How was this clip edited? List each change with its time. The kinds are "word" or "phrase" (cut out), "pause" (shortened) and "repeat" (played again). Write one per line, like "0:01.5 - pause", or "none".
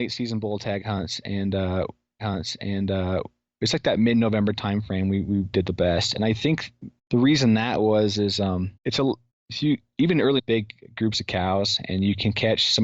0:02.2 - repeat
0:05.5 - word
0:07.0 - pause
0:08.8 - pause
0:09.3 - pause
0:10.4 - phrase